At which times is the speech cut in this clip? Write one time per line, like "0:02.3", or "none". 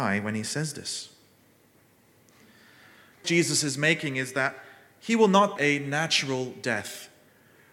0:03.2
0:05.6